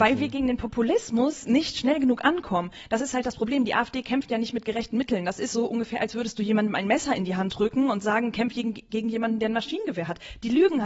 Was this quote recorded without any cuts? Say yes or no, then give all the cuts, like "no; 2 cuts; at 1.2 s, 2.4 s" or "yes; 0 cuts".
yes; 0 cuts